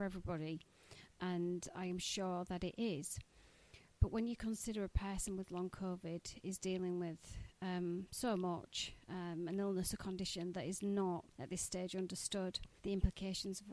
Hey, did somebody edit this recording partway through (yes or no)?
yes